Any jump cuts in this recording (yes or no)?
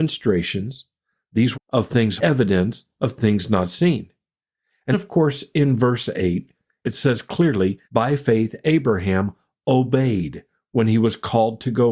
yes